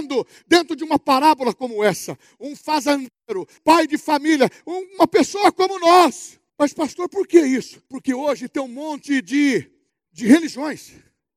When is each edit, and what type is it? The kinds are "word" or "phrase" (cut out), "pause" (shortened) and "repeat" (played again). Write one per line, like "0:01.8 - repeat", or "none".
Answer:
0:03.6 - word
0:06.5 - pause
0:07.9 - pause
0:09.9 - pause